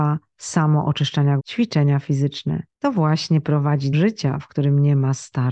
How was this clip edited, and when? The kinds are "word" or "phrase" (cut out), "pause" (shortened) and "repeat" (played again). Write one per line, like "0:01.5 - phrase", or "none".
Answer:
0:01.4 - word
0:02.7 - pause
0:03.9 - word